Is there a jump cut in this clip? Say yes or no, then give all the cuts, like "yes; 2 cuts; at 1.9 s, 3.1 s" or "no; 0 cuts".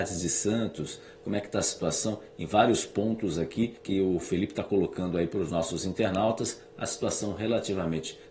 yes; 1 cut; at 3.8 s